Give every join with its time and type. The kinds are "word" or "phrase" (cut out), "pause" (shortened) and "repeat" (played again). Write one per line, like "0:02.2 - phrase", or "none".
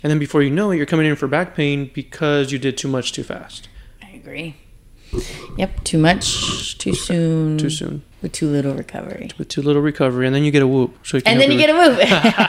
0:08.1 - pause
0:11.0 - pause